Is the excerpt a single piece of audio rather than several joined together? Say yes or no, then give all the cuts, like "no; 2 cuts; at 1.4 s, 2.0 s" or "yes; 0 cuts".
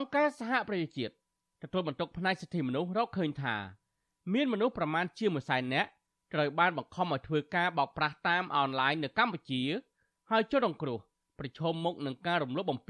yes; 0 cuts